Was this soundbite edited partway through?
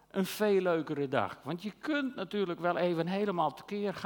no; 0 cuts

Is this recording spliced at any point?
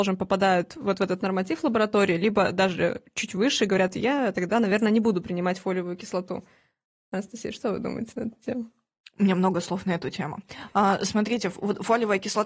no; 0 cuts

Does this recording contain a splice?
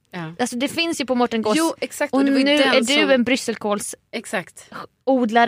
no; 0 cuts

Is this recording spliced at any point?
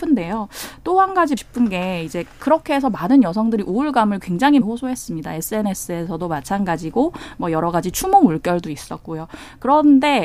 yes; 2 cuts; at 1.4 s, 4.6 s

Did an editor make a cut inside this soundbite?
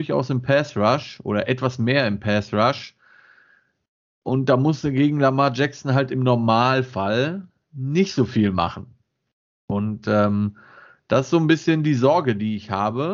no; 0 cuts

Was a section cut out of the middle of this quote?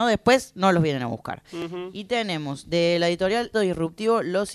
yes; 1 cut; at 3.5 s

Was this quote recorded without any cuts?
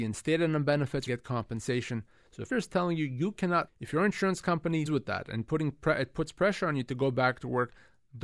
no; 4 cuts; at 1.1 s, 2.5 s, 3.7 s, 4.9 s

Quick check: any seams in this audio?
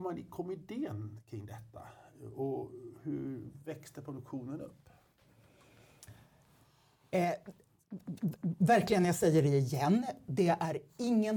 no; 0 cuts

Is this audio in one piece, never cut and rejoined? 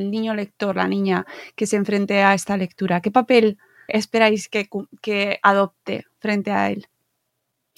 no; 1 cut; at 3.9 s

